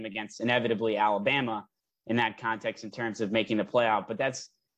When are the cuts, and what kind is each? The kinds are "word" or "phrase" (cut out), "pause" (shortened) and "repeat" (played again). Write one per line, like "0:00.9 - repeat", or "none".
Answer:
none